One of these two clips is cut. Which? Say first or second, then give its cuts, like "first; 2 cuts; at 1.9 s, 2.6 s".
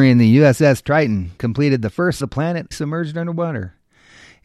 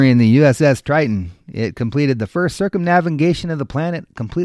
first; 3 cuts; at 1.4 s, 2.2 s, 2.7 s